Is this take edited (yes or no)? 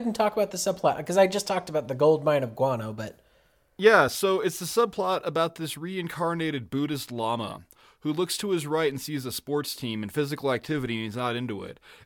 no